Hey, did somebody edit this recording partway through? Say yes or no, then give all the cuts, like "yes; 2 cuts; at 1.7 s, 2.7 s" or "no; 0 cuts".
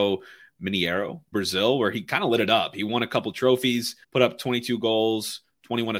yes; 2 cuts; at 1.3 s, 4.0 s